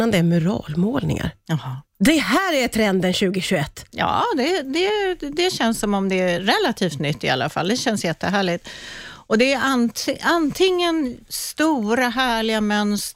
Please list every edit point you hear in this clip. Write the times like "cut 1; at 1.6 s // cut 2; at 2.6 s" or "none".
none